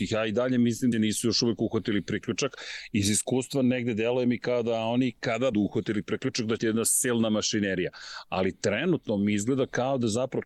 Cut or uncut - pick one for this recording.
cut